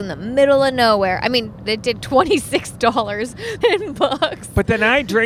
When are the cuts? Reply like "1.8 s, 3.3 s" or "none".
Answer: 1.6 s, 2.0 s, 3.6 s